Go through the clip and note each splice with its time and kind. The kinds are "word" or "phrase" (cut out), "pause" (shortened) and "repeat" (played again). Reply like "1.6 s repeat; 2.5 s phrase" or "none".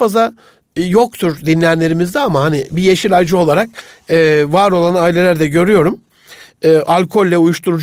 none